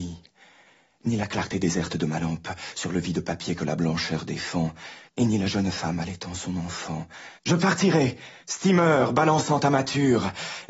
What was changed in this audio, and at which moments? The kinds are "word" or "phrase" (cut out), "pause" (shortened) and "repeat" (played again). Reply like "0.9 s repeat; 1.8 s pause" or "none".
5.1 s pause; 7.4 s pause; 8.4 s pause